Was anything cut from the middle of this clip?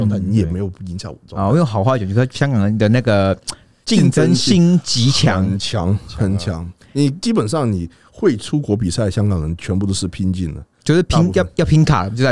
no; 0 cuts

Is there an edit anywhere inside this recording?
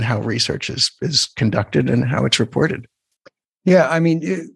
no; 0 cuts

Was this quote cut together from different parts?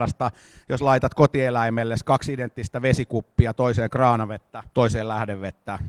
yes; 1 cut; at 4.7 s

